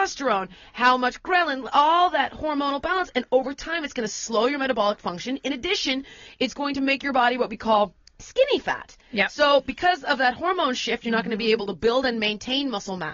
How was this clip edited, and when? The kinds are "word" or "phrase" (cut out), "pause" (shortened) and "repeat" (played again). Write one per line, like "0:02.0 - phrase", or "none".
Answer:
0:08.0 - pause